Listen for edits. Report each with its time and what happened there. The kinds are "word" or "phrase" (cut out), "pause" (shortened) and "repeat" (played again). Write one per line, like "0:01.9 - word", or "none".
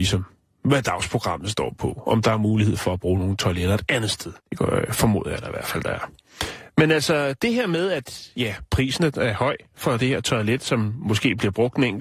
0:04.4 - pause